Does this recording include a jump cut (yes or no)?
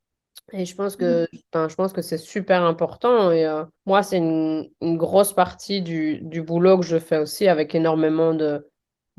yes